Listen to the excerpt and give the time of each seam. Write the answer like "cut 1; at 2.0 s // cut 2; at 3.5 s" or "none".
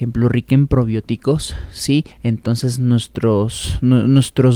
cut 1; at 2.1 s